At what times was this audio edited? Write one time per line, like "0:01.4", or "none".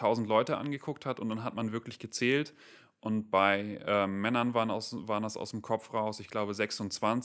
none